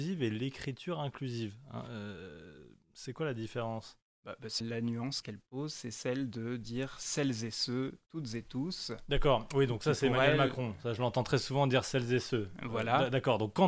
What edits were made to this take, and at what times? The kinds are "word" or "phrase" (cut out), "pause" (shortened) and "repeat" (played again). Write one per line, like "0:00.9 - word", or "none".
0:04.6 - word
0:05.2 - word